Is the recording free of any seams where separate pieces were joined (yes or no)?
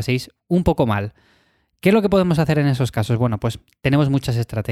yes